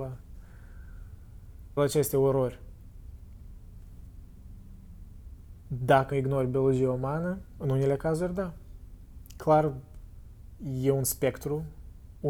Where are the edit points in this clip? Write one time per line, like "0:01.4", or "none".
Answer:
0:01.8
0:06.1